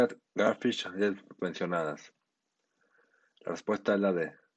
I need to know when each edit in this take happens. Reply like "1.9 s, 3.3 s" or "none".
1.4 s